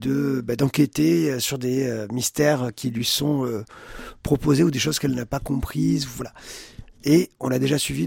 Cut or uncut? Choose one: uncut